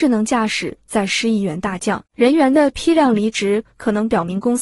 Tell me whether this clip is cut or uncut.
cut